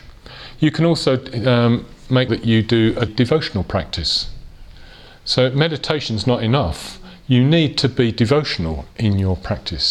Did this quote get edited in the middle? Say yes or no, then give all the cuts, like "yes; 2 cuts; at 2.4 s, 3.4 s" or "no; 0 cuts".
yes; 2 cuts; at 2.3 s, 3.1 s